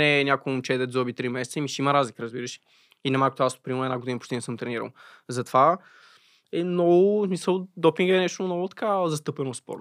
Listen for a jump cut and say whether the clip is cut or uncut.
uncut